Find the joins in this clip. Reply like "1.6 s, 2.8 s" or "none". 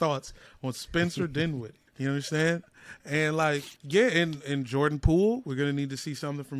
1.9 s, 3.8 s

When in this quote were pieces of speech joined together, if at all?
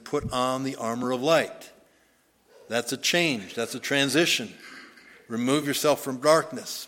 none

